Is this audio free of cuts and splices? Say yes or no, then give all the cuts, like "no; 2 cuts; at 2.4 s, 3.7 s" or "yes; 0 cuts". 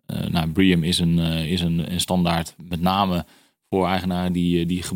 yes; 0 cuts